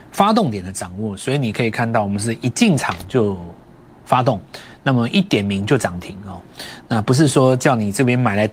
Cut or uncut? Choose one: uncut